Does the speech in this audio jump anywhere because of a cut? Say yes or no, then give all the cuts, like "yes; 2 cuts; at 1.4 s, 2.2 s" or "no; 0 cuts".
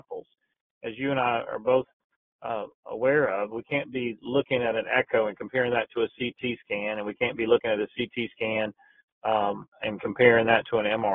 yes; 1 cut; at 9.7 s